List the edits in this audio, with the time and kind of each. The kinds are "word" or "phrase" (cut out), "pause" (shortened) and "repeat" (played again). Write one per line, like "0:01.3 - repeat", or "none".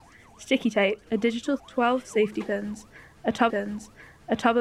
0:01.1 - pause
0:01.6 - word
0:03.5 - repeat

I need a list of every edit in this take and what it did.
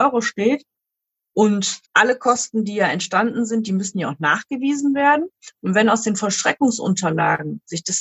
0:01.8 - pause

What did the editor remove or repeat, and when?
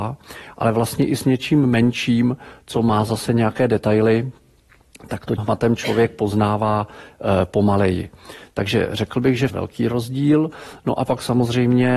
0:05.4 - word
0:09.5 - phrase

